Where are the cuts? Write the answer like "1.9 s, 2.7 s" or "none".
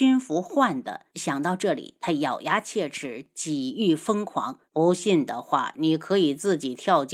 1.1 s, 4.7 s

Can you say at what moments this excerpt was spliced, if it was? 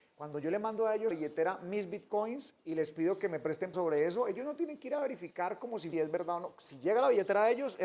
1.1 s, 2.6 s, 3.7 s, 5.9 s

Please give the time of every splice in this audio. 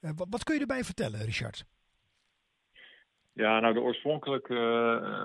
none

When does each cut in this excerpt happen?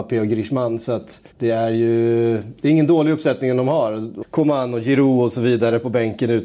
1.3 s, 4.2 s

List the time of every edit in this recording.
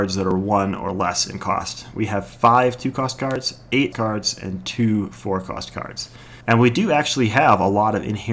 3.9 s, 6.4 s

